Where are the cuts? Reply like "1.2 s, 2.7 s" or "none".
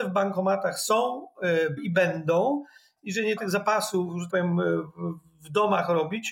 1.8 s, 3.4 s, 4.3 s